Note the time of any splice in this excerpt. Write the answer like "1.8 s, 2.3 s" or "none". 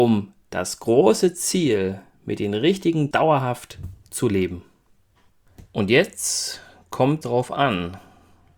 3.1 s, 5.7 s, 7.2 s